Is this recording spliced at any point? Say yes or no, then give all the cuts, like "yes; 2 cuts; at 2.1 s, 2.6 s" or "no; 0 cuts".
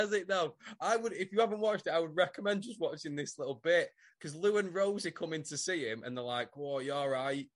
no; 0 cuts